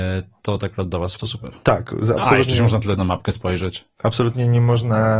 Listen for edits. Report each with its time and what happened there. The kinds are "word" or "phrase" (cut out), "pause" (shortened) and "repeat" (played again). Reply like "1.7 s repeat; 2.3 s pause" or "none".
1.2 s word; 3.0 s word

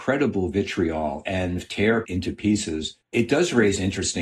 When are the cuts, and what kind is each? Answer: 1.6 s phrase; 2.0 s word; 3.0 s pause

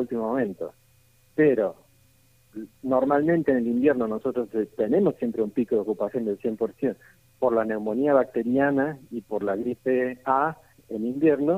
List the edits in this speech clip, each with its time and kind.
none

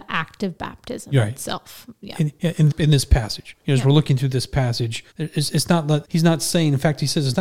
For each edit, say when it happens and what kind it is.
2.7 s word; 3.6 s pause; 5.1 s pause; 6.0 s word

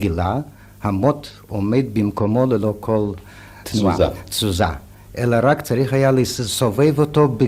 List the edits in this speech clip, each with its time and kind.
3.6 s word

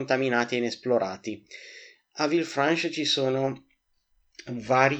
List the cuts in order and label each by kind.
none

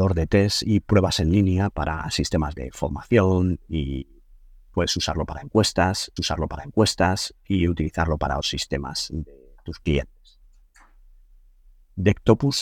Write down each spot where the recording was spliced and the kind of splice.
1.7 s word; 6.2 s repeat; 8.4 s word; 9.6 s word

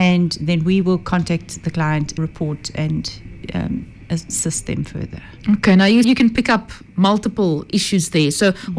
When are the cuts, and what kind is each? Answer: 2.2 s phrase; 6.0 s word

